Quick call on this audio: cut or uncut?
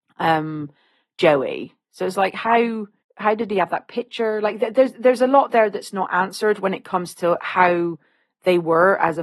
cut